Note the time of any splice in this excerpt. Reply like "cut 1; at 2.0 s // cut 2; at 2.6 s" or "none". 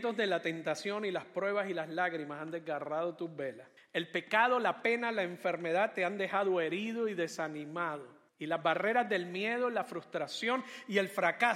cut 1; at 3.8 s // cut 2; at 8.3 s